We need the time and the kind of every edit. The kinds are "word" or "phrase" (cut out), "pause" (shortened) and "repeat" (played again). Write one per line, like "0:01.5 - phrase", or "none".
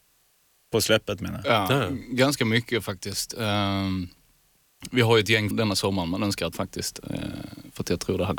0:05.5 - word
0:06.5 - phrase